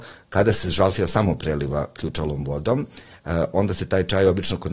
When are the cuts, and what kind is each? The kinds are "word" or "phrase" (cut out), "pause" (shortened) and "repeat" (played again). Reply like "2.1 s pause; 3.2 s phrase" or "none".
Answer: none